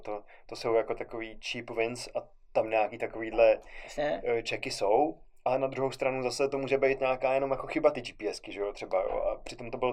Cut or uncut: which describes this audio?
uncut